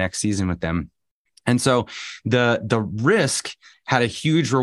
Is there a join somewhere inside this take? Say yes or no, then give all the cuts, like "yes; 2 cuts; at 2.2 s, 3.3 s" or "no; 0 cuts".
no; 0 cuts